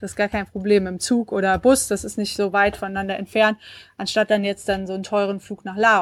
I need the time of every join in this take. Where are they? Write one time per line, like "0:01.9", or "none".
none